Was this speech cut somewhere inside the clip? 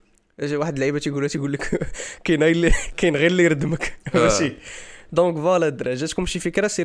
no; 0 cuts

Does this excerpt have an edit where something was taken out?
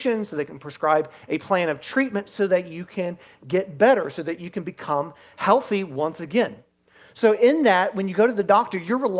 no; 0 cuts

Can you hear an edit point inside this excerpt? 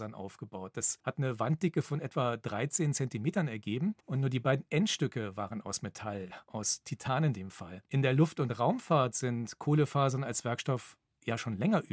yes; 3 cuts; at 1.0 s, 4.0 s, 7.9 s

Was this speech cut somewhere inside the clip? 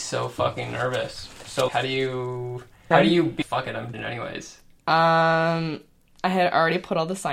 yes; 4 cuts; at 1.7 s, 2.9 s, 3.4 s, 3.9 s

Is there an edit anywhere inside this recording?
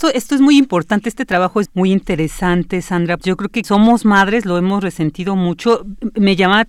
yes; 3 cuts; at 1.7 s, 3.2 s, 3.6 s

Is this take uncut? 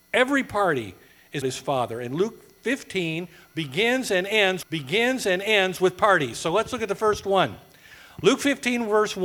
no; 2 cuts; at 1.4 s, 4.6 s

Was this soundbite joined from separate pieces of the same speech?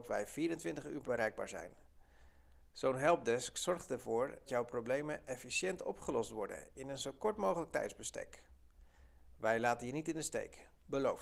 yes; 2 cuts; at 1.0 s, 4.5 s

